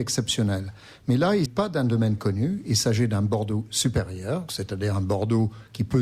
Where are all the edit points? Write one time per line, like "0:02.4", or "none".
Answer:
0:01.5
0:02.2
0:04.5